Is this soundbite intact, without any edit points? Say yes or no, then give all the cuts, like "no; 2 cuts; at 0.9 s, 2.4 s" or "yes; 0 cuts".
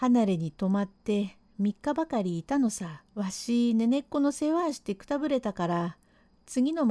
no; 1 cut; at 3.1 s